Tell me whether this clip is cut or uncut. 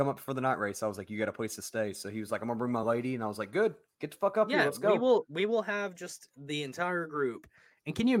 uncut